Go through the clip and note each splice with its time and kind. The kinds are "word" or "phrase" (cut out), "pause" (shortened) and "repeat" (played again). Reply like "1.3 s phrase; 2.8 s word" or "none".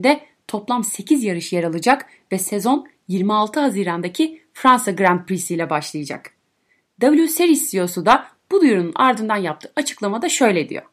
none